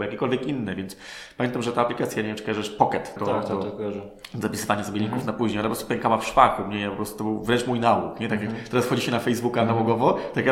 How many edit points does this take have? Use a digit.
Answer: 1